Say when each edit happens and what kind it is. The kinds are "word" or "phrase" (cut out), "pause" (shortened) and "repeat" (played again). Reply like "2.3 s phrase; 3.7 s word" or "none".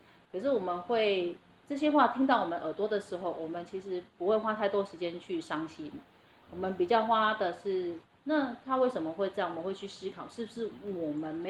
none